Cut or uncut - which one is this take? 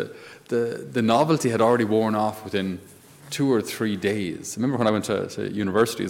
uncut